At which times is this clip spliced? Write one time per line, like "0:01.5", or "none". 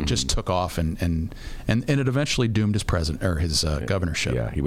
none

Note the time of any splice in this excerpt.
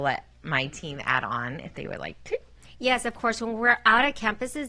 none

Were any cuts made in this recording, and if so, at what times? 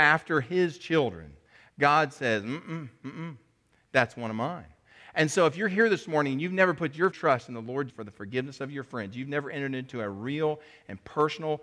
0:07.1
0:07.9

